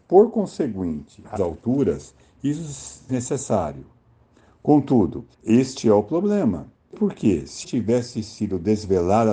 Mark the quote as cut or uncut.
cut